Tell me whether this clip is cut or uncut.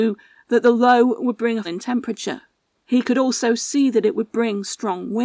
cut